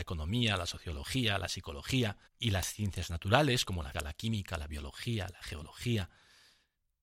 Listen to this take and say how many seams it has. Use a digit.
2